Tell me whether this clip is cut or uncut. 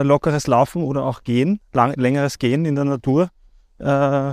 uncut